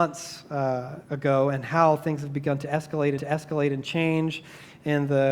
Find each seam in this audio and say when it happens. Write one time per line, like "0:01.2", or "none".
0:01.0
0:03.2